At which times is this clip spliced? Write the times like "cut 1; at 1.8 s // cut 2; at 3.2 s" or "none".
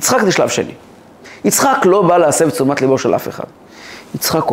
none